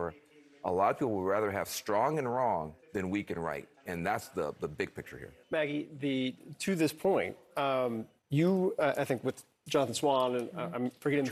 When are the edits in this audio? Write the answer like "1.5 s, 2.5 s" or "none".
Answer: 2.8 s, 3.8 s, 5.4 s, 8.2 s

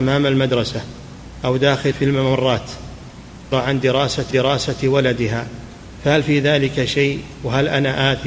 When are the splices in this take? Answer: 1.9 s, 3.5 s, 4.3 s

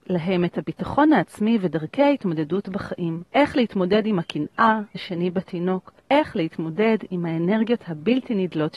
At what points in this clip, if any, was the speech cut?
3.3 s, 4.9 s, 6.0 s

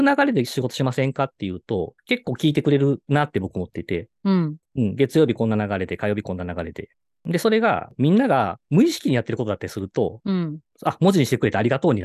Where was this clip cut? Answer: none

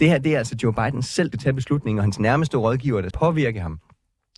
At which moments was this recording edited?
1.3 s, 3.1 s

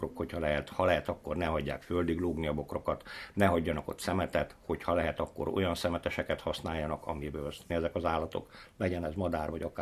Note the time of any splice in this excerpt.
7.7 s

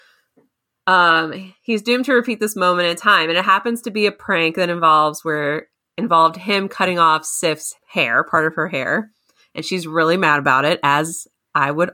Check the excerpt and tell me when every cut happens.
7.8 s

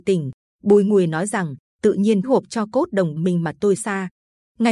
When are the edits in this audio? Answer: 2.2 s, 3.2 s, 3.8 s

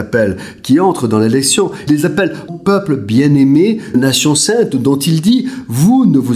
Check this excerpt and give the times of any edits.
1.9 s, 2.5 s, 3.9 s

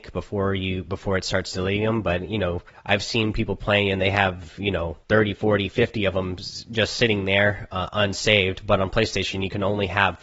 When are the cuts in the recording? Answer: 2.7 s, 5.0 s

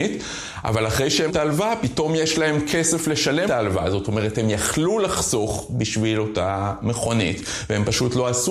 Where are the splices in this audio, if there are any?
1.3 s, 3.5 s

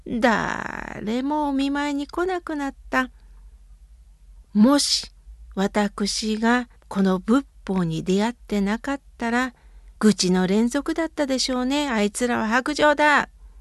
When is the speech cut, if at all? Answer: 4.4 s, 6.8 s, 10.0 s

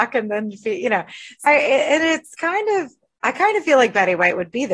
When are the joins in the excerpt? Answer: 1.5 s

